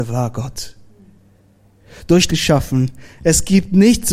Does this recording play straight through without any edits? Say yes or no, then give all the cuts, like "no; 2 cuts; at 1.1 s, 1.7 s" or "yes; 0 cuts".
no; 1 cut; at 2.3 s